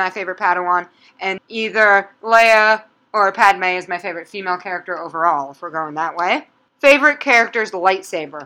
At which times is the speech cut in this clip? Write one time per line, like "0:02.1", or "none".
0:01.4